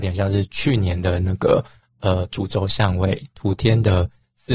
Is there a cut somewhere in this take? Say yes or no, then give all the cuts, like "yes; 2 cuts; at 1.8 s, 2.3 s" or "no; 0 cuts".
yes; 1 cut; at 1.8 s